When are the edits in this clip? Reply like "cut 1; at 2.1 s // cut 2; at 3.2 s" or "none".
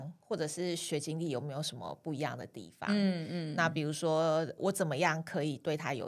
cut 1; at 4.6 s